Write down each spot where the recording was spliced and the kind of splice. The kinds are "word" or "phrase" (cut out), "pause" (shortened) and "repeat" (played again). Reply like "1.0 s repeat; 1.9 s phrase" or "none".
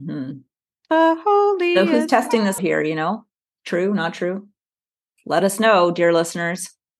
2.6 s word